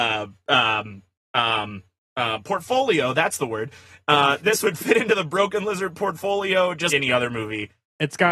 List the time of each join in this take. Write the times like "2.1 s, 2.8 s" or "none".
6.9 s